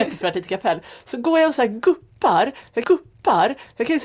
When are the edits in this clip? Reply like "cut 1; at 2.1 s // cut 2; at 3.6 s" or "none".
cut 1; at 2.8 s

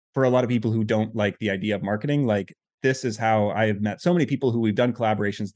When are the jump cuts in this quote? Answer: none

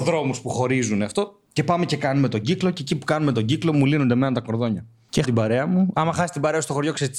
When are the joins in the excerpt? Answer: cut 1; at 1.5 s // cut 2; at 5.2 s

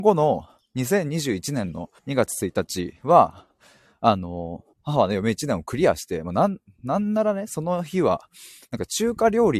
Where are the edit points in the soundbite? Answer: cut 1; at 2.0 s // cut 2; at 3.0 s // cut 3; at 4.7 s

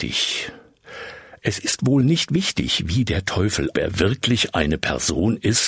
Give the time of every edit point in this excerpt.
cut 1; at 3.7 s

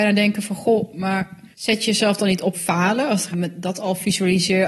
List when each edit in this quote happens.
cut 1; at 1.5 s // cut 2; at 2.5 s // cut 3; at 3.3 s

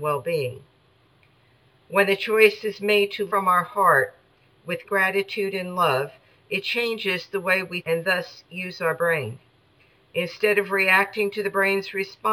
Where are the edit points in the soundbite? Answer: cut 1; at 3.3 s // cut 2; at 4.8 s // cut 3; at 7.8 s

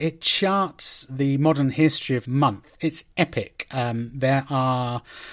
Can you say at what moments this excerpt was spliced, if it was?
cut 1; at 1.1 s // cut 2; at 2.2 s

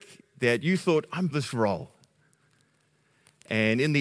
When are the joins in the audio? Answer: cut 1; at 1.3 s

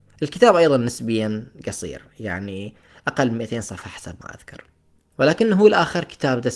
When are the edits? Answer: none

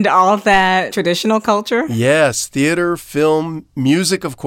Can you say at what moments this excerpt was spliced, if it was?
cut 1; at 0.9 s

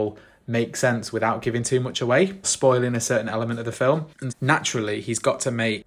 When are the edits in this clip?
cut 1; at 2.4 s // cut 2; at 4.3 s

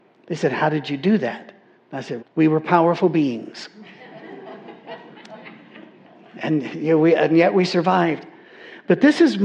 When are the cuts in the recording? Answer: cut 1; at 2.2 s

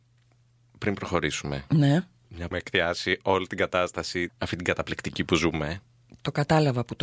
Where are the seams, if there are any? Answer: cut 1; at 2.5 s // cut 2; at 4.3 s

